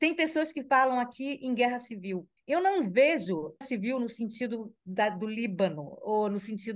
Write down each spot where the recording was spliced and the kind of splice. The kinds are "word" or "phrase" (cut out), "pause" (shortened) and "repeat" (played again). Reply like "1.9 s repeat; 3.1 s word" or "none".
2.4 s pause; 3.6 s word